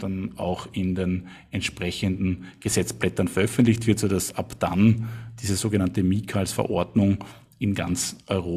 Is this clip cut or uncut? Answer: uncut